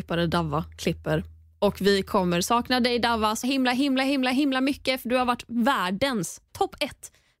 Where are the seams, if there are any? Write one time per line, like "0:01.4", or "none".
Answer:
0:03.4